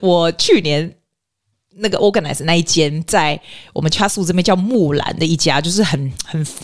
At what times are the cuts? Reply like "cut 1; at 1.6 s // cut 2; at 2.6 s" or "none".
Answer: none